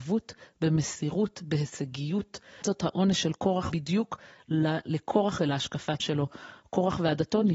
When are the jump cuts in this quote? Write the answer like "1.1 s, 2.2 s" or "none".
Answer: 2.6 s, 3.7 s, 5.4 s, 6.0 s